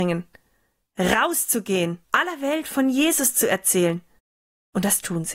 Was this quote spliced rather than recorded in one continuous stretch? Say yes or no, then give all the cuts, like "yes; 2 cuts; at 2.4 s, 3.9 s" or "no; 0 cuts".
yes; 2 cuts; at 2.0 s, 4.2 s